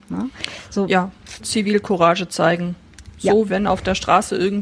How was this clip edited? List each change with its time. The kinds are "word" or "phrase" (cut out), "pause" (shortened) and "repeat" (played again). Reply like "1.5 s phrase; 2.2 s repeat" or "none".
1.4 s word; 3.5 s word